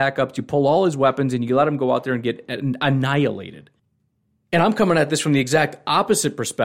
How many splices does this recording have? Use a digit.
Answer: 0